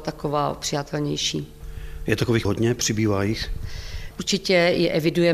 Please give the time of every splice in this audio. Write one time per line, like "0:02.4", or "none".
0:02.4